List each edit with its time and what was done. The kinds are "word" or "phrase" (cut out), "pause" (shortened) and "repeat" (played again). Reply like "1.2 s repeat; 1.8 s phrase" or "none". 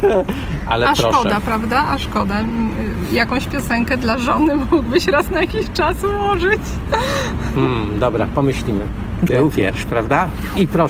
none